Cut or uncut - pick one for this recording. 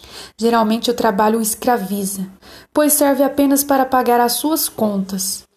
uncut